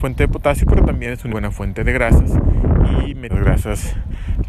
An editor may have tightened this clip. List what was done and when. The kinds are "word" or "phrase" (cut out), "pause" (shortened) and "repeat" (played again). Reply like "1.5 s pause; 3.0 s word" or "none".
1.3 s word; 3.3 s phrase